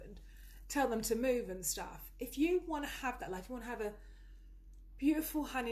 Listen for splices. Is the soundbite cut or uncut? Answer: uncut